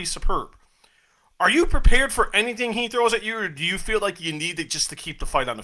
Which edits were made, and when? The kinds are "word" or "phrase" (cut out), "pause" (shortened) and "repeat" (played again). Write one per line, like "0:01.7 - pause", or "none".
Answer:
none